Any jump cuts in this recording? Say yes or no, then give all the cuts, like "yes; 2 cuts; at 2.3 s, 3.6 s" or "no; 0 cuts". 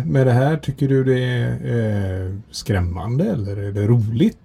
no; 0 cuts